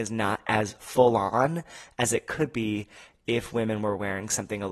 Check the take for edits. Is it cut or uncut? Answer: uncut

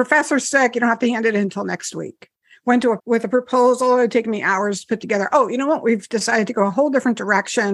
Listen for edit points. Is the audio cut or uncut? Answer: cut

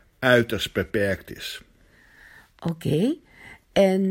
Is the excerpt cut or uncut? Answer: uncut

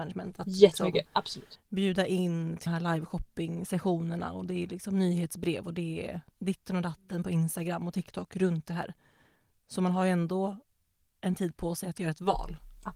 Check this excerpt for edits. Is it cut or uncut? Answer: cut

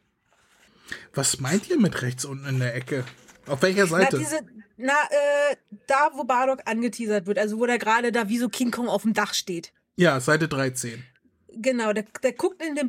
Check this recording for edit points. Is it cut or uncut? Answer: cut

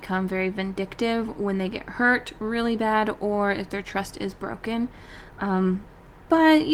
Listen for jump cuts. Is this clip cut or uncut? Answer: uncut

